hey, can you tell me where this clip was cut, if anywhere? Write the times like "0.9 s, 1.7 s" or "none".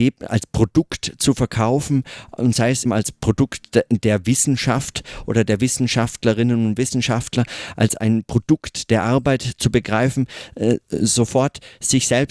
2.8 s